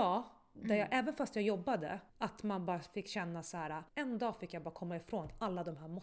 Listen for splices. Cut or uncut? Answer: cut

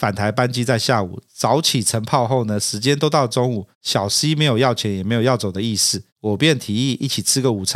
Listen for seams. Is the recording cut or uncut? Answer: uncut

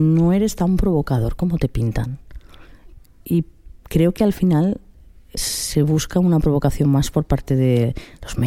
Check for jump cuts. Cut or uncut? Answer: uncut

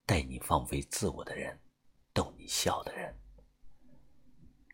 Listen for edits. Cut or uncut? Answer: uncut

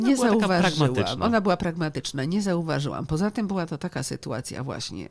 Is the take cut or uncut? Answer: uncut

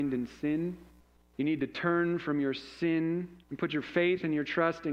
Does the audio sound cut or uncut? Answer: cut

